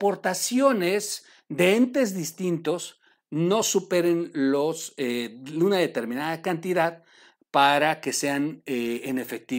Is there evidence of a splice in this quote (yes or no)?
no